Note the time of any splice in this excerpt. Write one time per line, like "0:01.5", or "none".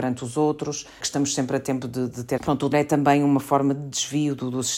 0:01.0
0:02.4
0:02.7

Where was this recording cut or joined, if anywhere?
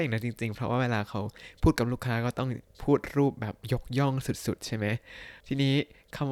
0:05.4

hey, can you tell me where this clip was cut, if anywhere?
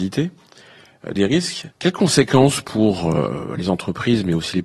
0:01.2
0:01.7

